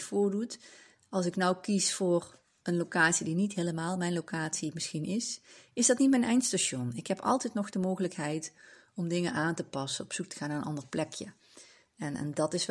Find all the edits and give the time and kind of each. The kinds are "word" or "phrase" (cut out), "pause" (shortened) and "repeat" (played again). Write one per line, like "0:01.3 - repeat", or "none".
none

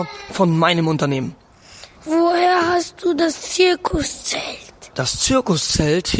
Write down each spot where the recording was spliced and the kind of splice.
0:01.9 - pause
0:04.9 - pause

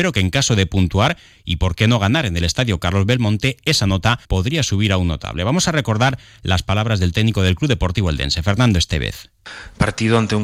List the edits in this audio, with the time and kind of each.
0:04.2 - pause

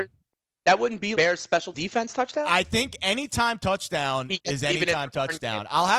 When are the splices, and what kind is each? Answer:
0:01.1 - word
0:01.7 - word

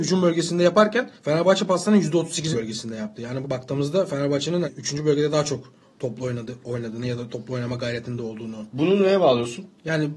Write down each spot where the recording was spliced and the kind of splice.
0:01.2 - pause
0:02.5 - word
0:03.4 - phrase
0:04.6 - word
0:05.8 - pause

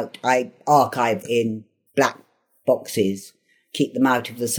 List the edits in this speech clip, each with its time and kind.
0:01.2 - word
0:01.9 - pause

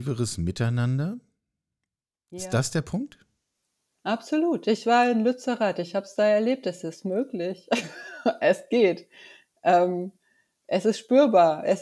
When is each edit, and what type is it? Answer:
none

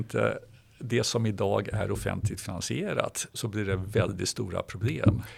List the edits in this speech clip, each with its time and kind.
0:03.3 - word

